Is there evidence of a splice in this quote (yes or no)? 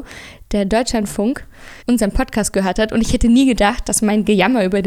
yes